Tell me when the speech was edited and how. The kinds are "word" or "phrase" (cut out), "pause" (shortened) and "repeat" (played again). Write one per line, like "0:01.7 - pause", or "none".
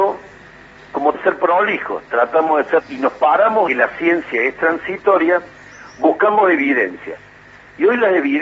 0:01.1 - word
0:02.8 - word
0:03.7 - phrase